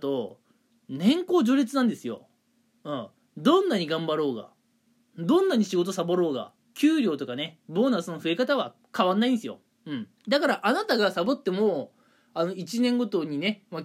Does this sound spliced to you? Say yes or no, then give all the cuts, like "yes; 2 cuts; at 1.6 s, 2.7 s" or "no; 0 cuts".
yes; 4 cuts; at 3.2 s, 6.6 s, 8.8 s, 10.2 s